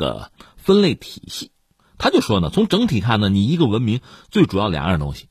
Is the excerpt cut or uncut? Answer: uncut